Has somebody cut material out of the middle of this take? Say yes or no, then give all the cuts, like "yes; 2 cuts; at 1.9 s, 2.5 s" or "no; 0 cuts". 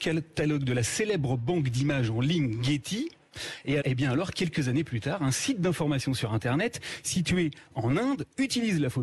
yes; 1 cut; at 3.8 s